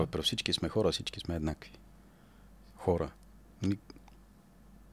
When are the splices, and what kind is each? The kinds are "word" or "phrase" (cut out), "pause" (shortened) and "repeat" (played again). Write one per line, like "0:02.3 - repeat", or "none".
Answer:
none